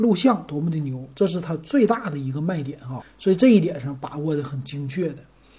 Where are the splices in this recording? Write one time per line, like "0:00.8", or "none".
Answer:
0:03.0